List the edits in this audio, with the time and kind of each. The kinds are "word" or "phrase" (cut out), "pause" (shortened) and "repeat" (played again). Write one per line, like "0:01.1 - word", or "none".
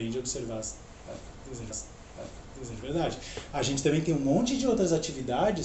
0:01.7 - repeat